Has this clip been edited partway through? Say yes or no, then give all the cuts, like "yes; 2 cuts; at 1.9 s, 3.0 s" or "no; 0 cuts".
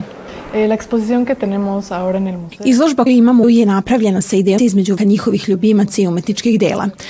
yes; 4 cuts; at 3.1 s, 3.4 s, 4.6 s, 5.0 s